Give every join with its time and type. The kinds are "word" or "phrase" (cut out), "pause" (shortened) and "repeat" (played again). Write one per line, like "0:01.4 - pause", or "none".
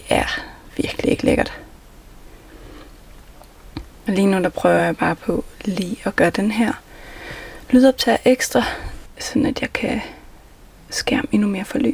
none